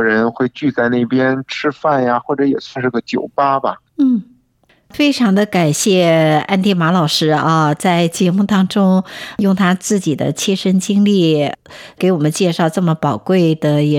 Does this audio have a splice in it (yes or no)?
yes